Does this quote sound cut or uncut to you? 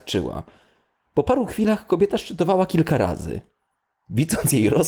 uncut